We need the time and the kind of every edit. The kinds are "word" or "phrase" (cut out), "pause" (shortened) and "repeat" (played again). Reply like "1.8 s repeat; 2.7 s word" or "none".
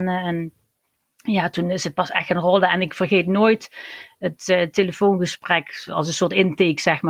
none